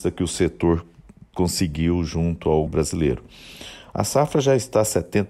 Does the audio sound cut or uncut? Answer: cut